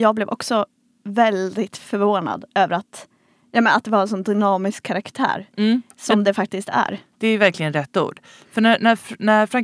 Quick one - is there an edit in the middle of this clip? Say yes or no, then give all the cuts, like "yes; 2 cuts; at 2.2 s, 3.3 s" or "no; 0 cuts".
no; 0 cuts